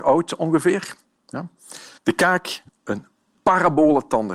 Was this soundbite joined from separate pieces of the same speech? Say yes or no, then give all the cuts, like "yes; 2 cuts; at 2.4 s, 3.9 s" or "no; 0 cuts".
yes; 2 cuts; at 2.0 s, 2.7 s